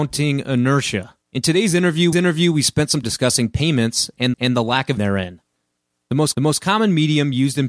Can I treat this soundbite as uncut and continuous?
no; 6 cuts; at 1.2 s, 2.1 s, 3.0 s, 4.3 s, 5.0 s, 6.3 s

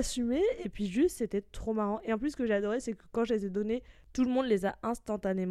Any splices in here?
no; 0 cuts

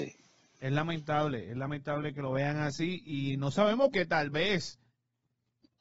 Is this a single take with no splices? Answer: no; 1 cut; at 3.9 s

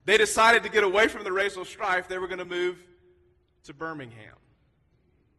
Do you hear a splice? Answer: no; 0 cuts

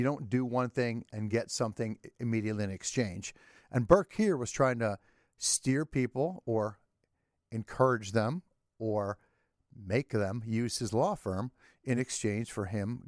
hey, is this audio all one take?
yes; 0 cuts

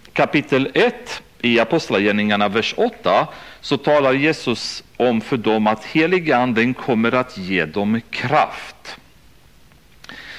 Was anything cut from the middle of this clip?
no; 0 cuts

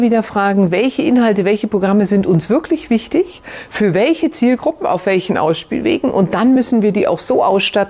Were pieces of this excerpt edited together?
no; 0 cuts

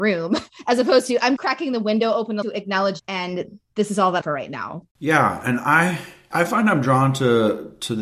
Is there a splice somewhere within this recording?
yes; 5 cuts; at 1.4 s, 2.4 s, 3.0 s, 4.2 s, 6.3 s

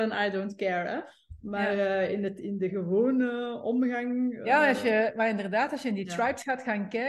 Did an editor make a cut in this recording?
no; 0 cuts

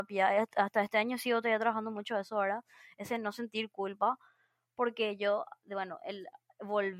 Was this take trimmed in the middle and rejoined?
no; 0 cuts

